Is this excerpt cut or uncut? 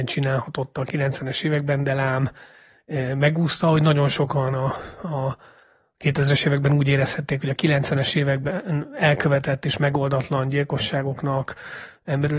uncut